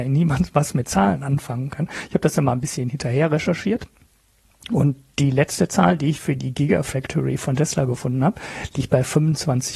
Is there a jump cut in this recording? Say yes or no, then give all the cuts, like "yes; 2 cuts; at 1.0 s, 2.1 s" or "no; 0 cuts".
no; 0 cuts